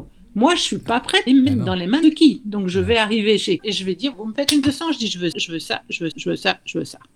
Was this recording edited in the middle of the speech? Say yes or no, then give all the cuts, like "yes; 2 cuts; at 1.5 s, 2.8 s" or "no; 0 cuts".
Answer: yes; 7 cuts; at 1.3 s, 2.0 s, 3.6 s, 4.1 s, 4.6 s, 5.3 s, 6.1 s